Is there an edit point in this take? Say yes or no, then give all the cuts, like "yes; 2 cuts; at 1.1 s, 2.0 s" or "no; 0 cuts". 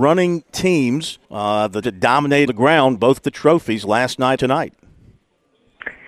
yes; 5 cuts; at 1.2 s, 1.8 s, 2.5 s, 3.2 s, 4.4 s